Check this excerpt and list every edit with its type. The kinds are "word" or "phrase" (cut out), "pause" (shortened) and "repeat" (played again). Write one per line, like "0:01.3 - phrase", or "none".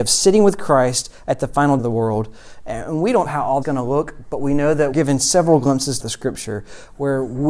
0:01.8 - word
0:03.3 - word
0:03.6 - word
0:04.9 - word
0:06.0 - word